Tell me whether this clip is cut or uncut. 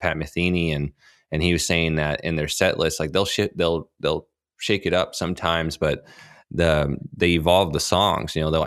uncut